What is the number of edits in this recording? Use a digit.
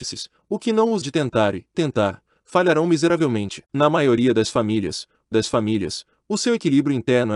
4